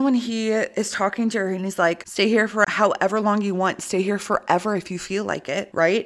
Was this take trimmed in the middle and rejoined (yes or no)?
no